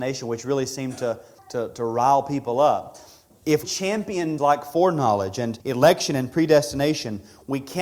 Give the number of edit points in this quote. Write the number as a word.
four